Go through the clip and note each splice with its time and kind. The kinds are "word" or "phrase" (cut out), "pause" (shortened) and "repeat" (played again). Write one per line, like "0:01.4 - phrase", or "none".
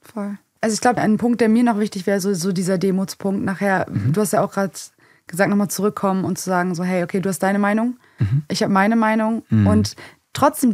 none